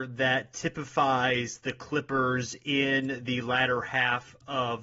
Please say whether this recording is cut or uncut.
uncut